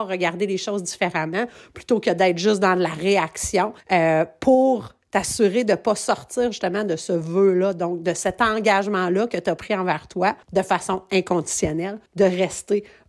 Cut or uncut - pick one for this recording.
cut